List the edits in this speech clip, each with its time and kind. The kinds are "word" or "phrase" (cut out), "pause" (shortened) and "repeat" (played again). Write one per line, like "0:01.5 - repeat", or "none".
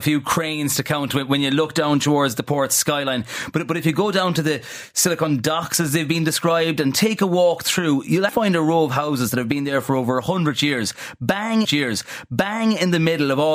0:08.3 - word
0:11.6 - repeat

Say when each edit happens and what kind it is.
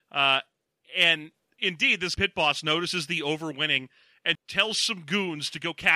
0:01.6 - word
0:02.2 - word
0:04.3 - word

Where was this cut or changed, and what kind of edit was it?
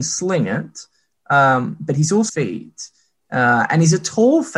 0:02.3 - phrase

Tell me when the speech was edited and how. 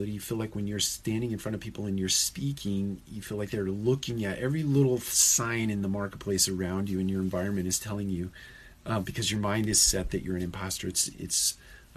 none

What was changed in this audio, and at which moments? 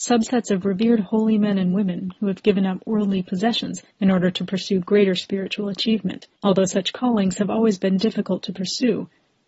0:03.9 - pause
0:06.4 - pause

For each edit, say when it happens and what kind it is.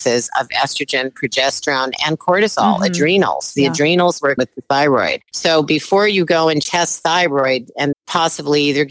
0:04.4 - phrase
0:05.3 - pause
0:06.6 - word
0:07.9 - word

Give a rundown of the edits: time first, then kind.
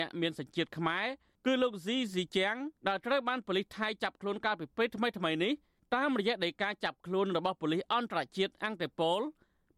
0:02.8 - pause

